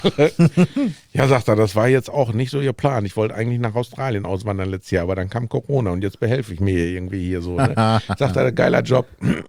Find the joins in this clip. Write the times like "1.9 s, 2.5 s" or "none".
none